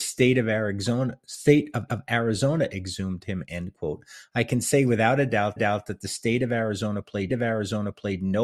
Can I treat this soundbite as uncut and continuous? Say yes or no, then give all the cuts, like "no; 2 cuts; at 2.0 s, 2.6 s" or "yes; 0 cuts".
no; 3 cuts; at 1.9 s, 5.6 s, 7.3 s